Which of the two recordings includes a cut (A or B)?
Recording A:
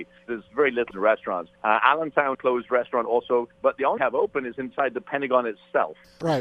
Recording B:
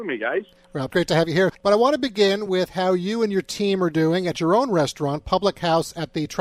A